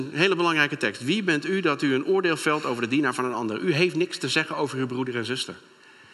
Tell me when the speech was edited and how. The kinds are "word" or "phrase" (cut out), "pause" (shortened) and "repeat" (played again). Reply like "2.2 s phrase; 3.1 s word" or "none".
none